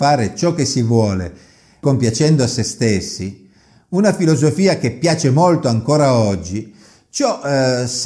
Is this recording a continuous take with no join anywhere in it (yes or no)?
yes